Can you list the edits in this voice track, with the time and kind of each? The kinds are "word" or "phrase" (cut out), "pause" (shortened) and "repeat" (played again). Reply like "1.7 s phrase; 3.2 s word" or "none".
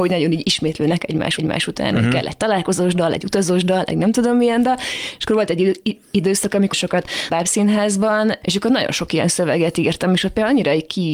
1.4 s repeat; 6.0 s pause; 6.7 s word; 7.3 s word; 8.4 s word